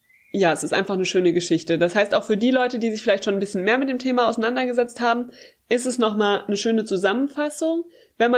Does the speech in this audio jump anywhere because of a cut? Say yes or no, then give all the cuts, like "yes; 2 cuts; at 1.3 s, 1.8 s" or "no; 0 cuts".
no; 0 cuts